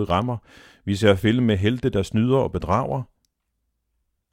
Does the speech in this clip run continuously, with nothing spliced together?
yes; 0 cuts

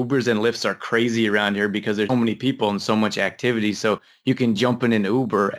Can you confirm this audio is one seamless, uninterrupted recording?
no; 1 cut; at 2.1 s

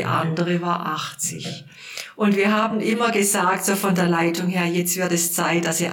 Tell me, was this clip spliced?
no; 0 cuts

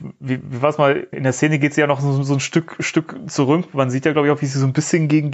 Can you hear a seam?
yes; 1 cut; at 1.1 s

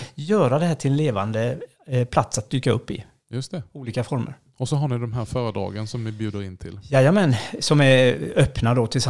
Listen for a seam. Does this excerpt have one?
no; 0 cuts

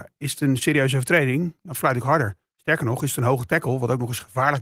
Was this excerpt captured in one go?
yes; 0 cuts

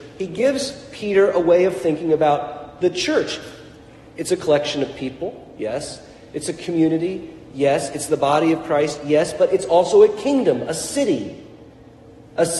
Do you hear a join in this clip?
no; 0 cuts

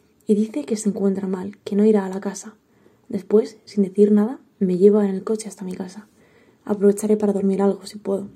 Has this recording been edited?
no; 0 cuts

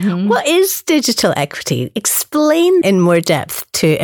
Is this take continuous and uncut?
no; 1 cut; at 2.8 s

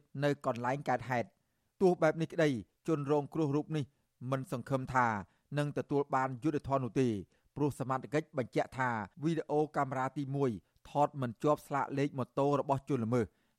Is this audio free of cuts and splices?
no; 1 cut; at 9.1 s

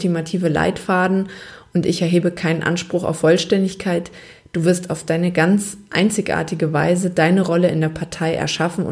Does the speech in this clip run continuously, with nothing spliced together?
yes; 0 cuts

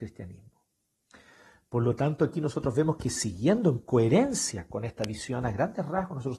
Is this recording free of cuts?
yes; 0 cuts

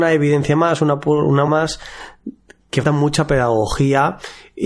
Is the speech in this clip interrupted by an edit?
yes; 2 cuts; at 1.5 s, 2.8 s

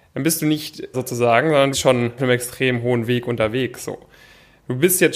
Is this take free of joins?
no; 3 cuts; at 0.9 s, 1.7 s, 2.2 s

